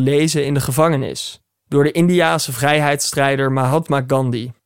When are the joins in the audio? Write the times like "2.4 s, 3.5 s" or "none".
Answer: none